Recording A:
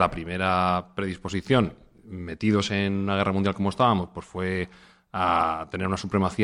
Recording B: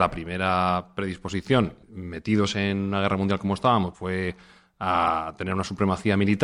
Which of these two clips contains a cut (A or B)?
B